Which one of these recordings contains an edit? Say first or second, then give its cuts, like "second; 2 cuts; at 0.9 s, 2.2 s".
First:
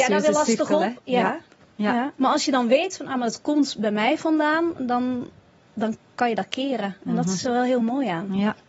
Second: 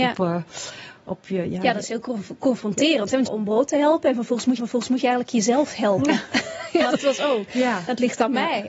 second; 3 cuts; at 3.3 s, 4.6 s, 6.9 s